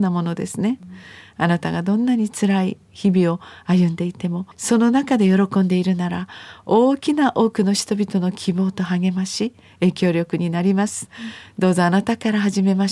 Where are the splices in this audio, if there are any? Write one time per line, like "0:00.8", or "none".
0:04.5